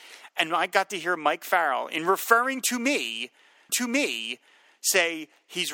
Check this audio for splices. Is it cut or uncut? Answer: cut